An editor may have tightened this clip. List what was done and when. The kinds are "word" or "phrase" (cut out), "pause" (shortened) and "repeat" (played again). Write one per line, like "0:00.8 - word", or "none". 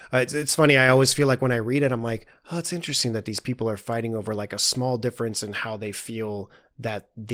none